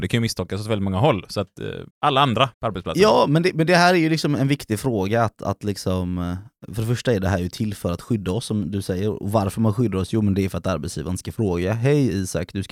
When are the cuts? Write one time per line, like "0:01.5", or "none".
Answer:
0:01.9
0:02.5